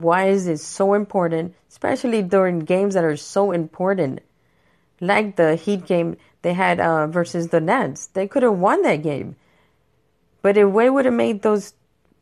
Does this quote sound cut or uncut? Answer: uncut